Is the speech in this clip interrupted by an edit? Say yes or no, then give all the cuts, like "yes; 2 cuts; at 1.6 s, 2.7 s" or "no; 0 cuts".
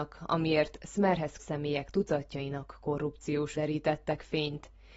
yes; 2 cuts; at 1.4 s, 3.5 s